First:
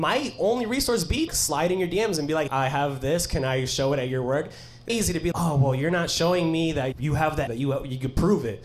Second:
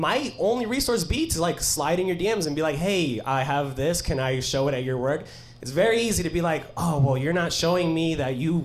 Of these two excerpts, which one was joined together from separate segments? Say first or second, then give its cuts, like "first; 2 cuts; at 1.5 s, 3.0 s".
first; 6 cuts; at 1.3 s, 2.5 s, 4.9 s, 5.3 s, 6.9 s, 7.5 s